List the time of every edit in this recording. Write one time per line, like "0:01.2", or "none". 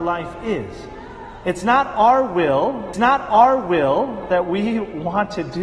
0:02.9

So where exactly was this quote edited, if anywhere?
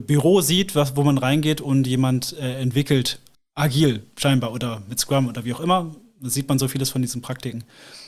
0:03.3

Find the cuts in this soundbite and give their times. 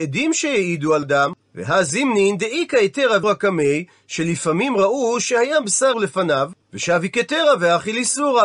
0:01.0
0:01.4
0:03.2
0:05.9
0:06.6

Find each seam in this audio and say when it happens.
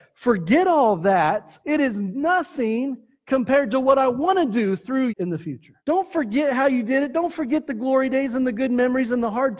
0:01.6
0:05.1
0:05.8

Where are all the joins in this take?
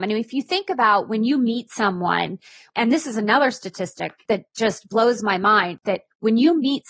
none

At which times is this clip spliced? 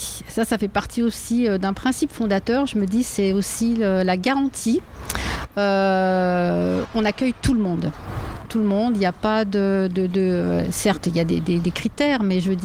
none

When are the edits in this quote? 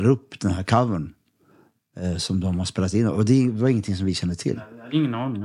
none

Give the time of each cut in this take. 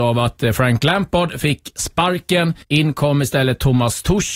0:02.6

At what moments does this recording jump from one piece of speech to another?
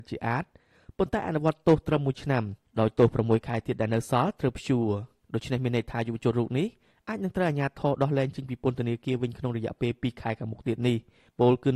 none

